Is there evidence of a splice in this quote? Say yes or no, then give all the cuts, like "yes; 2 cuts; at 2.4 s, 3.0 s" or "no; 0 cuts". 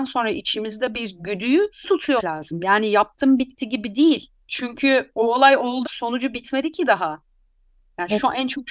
yes; 5 cuts; at 0.9 s, 1.8 s, 2.2 s, 4.4 s, 5.8 s